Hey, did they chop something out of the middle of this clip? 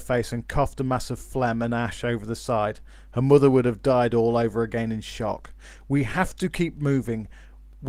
no; 0 cuts

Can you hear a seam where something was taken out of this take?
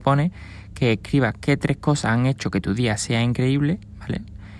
no; 0 cuts

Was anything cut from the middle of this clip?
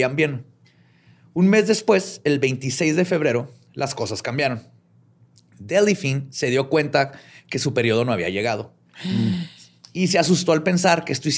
no; 0 cuts

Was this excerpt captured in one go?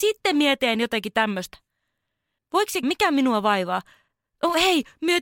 no; 1 cut; at 2.8 s

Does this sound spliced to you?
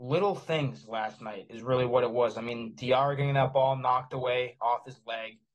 no; 0 cuts

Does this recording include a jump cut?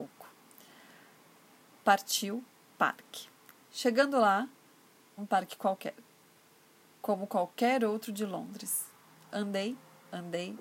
yes; 1 cut; at 5.2 s

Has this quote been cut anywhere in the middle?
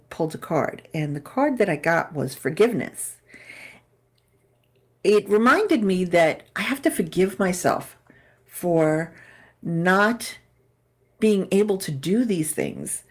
no; 0 cuts

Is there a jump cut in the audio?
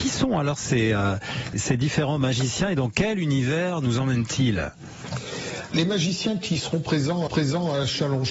yes; 3 cuts; at 1.5 s, 5.7 s, 7.3 s

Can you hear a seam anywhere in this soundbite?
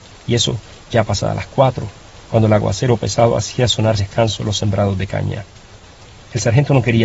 yes; 1 cut; at 4.0 s

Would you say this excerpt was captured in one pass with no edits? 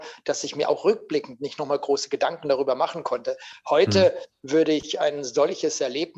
yes; 0 cuts

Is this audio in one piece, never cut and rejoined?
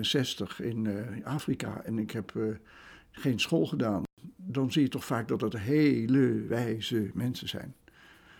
yes; 0 cuts

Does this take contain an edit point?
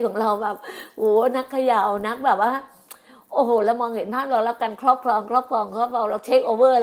no; 0 cuts

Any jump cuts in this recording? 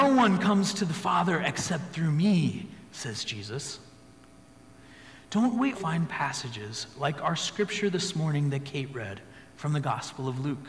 yes; 1 cut; at 5.7 s

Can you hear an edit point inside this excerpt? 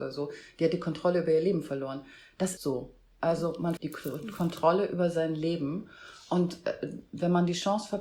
yes; 2 cuts; at 2.6 s, 3.8 s

